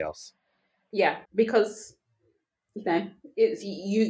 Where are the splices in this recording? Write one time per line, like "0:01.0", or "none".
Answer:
0:01.2